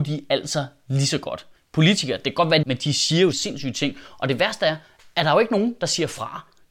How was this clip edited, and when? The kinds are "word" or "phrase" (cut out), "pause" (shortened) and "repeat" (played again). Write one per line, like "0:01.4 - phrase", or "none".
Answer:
0:01.6 - pause
0:02.6 - phrase
0:03.3 - phrase